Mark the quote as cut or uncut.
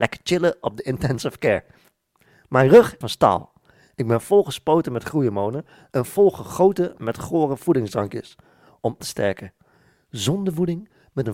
cut